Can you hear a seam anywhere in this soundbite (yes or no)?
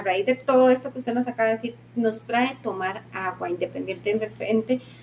no